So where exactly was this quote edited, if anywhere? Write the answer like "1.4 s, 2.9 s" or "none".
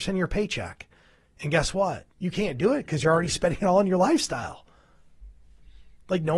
2.1 s